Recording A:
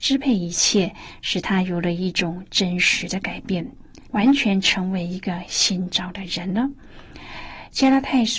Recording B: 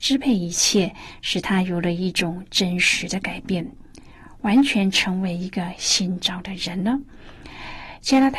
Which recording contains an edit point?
A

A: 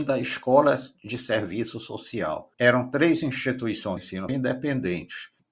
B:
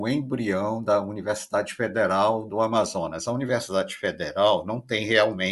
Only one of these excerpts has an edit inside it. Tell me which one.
A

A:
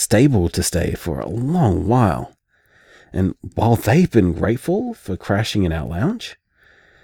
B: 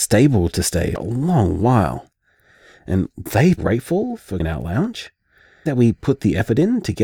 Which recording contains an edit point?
B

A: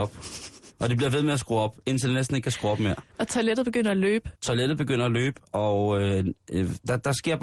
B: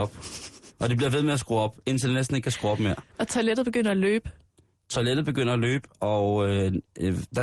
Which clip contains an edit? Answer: A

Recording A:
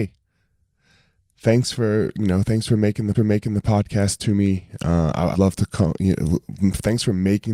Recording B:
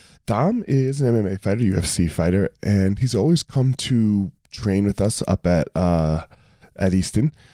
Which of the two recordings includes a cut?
A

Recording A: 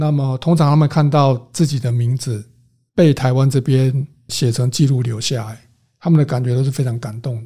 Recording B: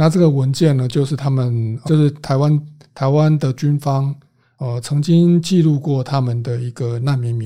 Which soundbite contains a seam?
B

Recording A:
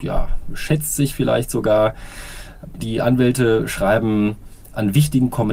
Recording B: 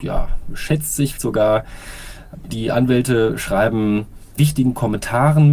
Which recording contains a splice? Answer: B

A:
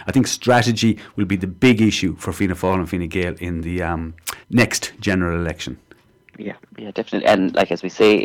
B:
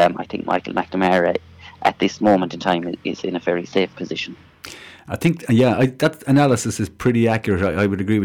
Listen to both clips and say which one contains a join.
A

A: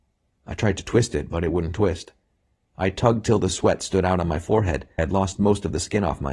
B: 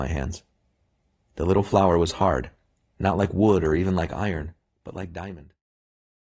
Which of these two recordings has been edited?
A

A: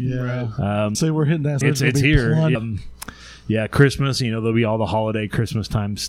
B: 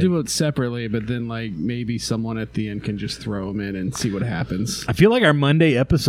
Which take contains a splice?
A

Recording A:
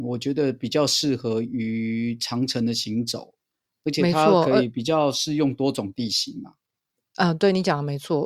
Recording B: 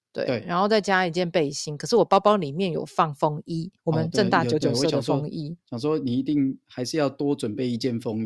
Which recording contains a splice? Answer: B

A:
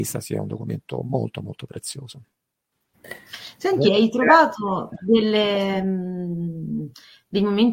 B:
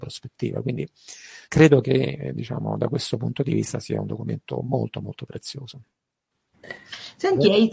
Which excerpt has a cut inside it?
B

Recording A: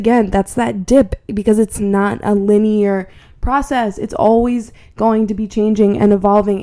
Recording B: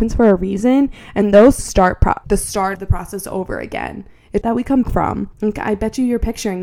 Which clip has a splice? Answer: B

